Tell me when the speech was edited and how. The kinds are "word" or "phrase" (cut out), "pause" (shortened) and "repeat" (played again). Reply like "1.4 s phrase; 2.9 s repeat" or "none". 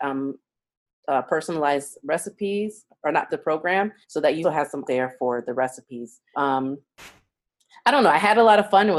3.3 s phrase; 4.0 s pause; 4.4 s word; 4.8 s word; 6.3 s word

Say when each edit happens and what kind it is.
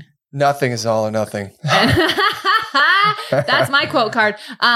none

